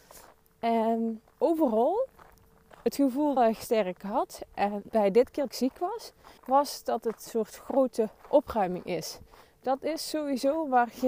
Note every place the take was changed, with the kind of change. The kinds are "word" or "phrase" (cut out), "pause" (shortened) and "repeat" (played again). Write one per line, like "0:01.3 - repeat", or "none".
0:01.3 - pause
0:03.4 - phrase
0:04.9 - word
0:05.5 - phrase
0:06.4 - pause
0:07.3 - phrase